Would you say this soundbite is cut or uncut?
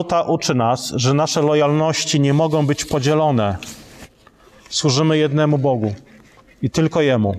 uncut